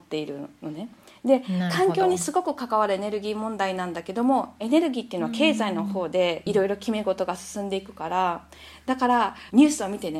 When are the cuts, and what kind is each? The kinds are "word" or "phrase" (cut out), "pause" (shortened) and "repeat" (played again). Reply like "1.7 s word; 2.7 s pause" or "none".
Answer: none